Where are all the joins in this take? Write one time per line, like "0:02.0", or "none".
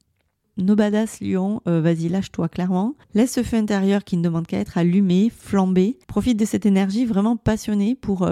0:03.0
0:06.0